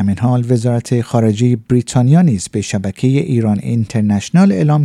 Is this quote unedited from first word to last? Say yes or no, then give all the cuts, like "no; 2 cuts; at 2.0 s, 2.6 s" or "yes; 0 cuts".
yes; 0 cuts